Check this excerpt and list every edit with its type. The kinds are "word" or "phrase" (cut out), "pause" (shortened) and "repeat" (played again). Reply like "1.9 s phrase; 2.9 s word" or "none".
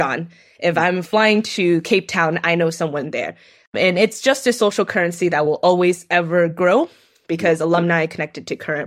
none